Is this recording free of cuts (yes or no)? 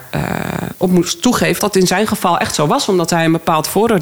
no